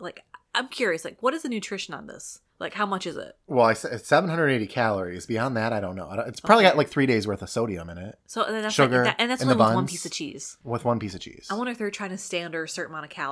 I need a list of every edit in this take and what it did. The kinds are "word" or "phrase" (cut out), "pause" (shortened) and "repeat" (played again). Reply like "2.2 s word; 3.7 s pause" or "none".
none